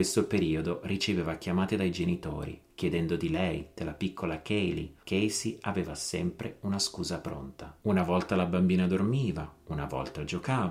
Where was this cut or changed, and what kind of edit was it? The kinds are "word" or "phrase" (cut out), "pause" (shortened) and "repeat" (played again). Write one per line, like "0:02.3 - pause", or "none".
0:05.0 - word